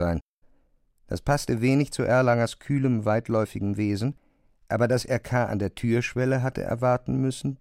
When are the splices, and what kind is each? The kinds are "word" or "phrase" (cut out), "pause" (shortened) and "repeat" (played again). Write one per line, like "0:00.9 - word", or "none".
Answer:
none